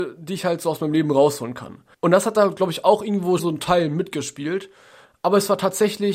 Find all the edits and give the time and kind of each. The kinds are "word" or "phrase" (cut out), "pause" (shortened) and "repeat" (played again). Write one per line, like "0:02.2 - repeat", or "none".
0:01.9 - pause
0:03.4 - word